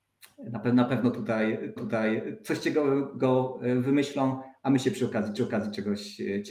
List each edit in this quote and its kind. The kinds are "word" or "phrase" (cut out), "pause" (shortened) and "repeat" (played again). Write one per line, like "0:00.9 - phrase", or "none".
0:01.8 - repeat
0:05.4 - repeat

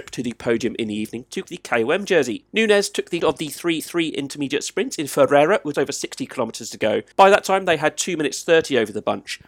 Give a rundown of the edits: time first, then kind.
0:01.4 - word
0:02.5 - pause
0:03.2 - word
0:03.8 - repeat
0:05.7 - word
0:07.1 - pause

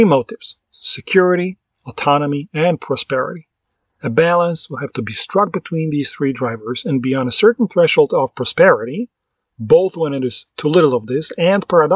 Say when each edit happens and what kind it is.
none

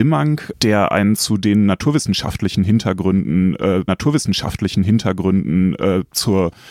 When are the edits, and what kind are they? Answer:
0:01.2 - phrase
0:03.9 - repeat

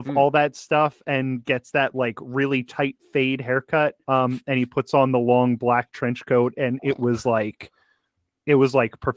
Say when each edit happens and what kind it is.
0:04.0 - pause

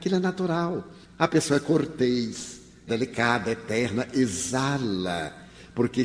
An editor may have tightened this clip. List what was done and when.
0:02.9 - word

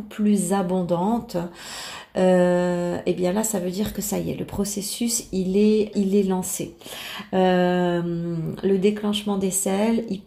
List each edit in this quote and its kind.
0:05.9 - word

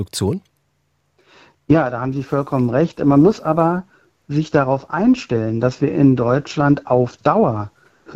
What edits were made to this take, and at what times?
none

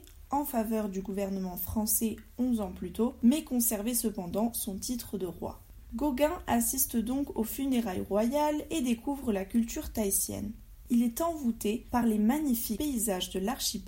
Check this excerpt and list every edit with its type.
none

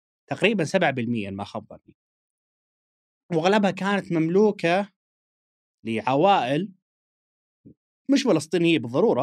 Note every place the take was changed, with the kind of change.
none

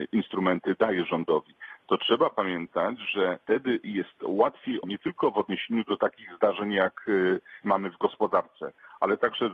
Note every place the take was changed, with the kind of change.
0:03.4 - pause
0:04.8 - word
0:07.6 - word

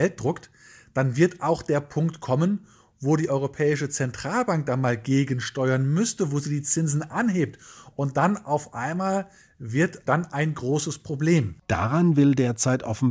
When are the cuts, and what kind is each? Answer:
0:10.1 - phrase

